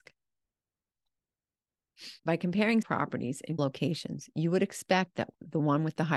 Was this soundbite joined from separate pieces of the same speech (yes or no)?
yes